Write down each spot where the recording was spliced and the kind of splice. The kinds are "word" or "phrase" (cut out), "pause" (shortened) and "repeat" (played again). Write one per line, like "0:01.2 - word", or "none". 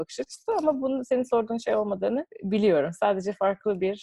none